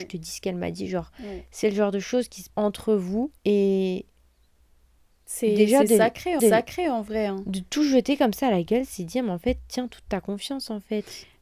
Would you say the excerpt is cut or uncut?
cut